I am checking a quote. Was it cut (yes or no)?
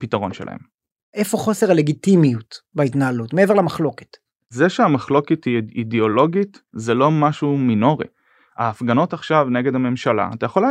no